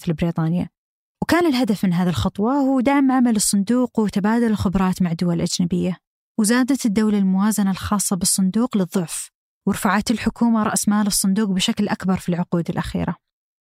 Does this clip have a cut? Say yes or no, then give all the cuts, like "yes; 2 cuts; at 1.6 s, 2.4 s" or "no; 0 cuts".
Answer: no; 0 cuts